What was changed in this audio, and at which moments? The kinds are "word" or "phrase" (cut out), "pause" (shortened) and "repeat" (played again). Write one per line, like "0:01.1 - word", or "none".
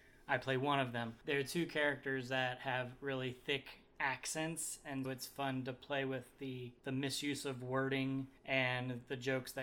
0:05.0 - word
0:08.4 - pause

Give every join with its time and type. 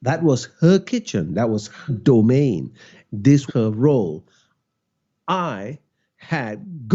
0:01.9 - word
0:03.5 - word

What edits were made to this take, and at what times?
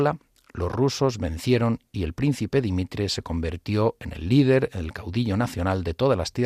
none

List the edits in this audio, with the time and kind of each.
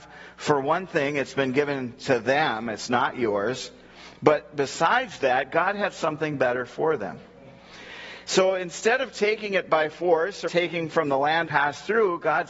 0:10.5 - word
0:11.5 - phrase

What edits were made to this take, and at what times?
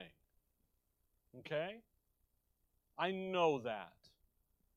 none

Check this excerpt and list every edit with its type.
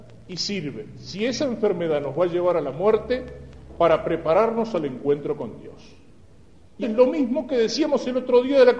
0:06.8 - word

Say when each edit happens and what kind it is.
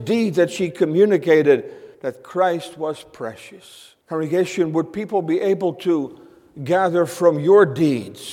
0:01.9 - pause
0:04.0 - pause

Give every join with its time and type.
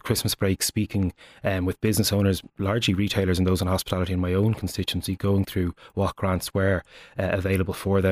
none

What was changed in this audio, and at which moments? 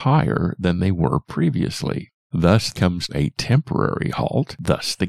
0:02.7 - word
0:03.1 - word

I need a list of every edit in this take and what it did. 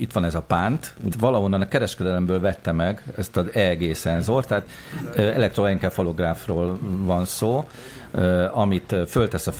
0:01.1 - word

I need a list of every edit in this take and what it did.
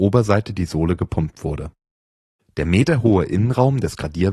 none

